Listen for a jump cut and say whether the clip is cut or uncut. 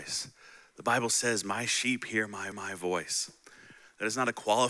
cut